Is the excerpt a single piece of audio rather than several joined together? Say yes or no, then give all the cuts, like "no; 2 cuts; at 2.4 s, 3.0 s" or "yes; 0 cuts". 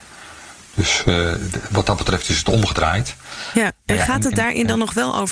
yes; 0 cuts